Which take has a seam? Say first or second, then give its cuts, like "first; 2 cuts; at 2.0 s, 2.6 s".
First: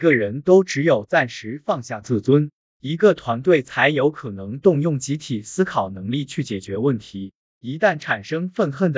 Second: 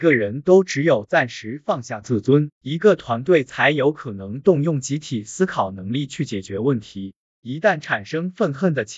second; 1 cut; at 2.5 s